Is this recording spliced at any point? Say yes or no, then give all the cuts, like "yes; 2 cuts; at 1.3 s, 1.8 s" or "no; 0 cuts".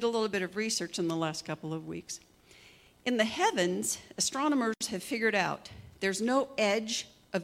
no; 0 cuts